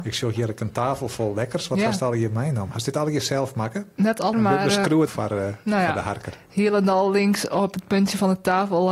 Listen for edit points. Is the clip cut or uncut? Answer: cut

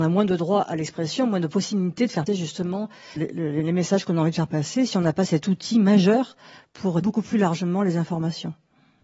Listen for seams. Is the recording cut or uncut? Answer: cut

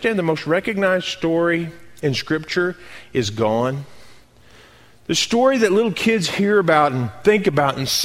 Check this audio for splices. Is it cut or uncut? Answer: uncut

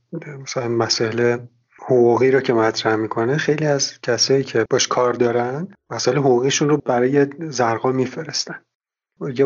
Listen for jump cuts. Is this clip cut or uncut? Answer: uncut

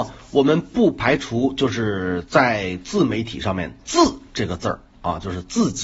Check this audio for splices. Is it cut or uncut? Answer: cut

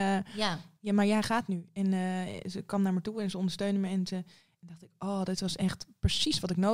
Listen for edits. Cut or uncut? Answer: uncut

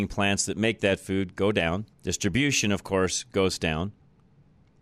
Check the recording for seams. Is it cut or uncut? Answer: cut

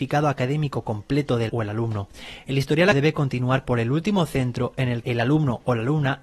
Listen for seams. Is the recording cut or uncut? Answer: cut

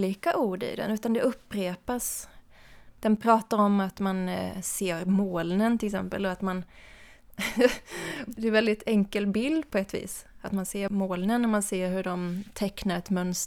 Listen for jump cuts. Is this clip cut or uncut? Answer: uncut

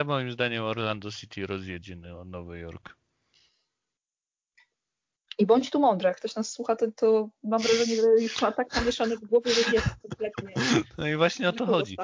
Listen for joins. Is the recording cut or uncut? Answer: uncut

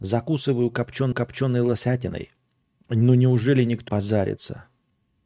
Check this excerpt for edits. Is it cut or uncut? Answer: cut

